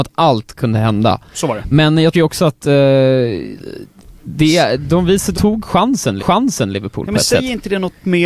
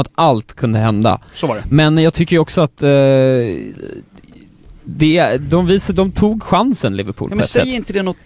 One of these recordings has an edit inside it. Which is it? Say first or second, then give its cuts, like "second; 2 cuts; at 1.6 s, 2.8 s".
first; 4 cuts; at 2.1 s, 4.0 s, 5.3 s, 6.2 s